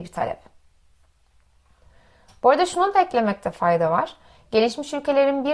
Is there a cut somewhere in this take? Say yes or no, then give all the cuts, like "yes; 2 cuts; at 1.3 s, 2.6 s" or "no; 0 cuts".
no; 0 cuts